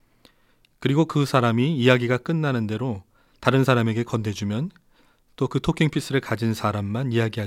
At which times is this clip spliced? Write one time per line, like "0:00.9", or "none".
none